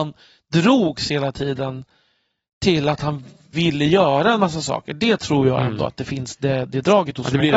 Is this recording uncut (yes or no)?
yes